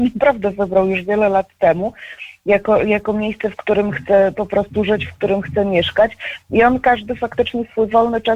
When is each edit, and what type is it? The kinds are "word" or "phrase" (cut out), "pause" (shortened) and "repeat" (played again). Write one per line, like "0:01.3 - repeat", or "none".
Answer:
none